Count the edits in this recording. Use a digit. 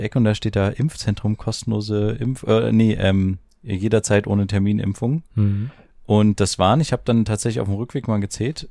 0